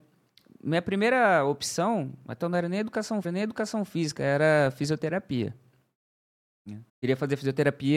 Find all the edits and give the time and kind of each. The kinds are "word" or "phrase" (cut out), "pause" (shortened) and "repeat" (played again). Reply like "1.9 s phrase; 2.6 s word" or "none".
2.4 s word; 3.2 s repeat; 6.9 s pause